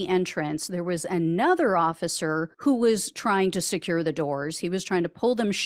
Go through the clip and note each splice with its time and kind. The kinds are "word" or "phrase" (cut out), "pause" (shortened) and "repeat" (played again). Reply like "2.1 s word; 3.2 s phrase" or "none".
2.5 s pause